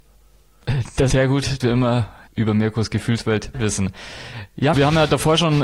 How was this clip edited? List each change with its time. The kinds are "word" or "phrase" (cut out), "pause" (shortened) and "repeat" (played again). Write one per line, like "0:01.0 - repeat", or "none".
0:01.1 - word
0:01.6 - word
0:02.3 - word
0:03.5 - word
0:04.7 - word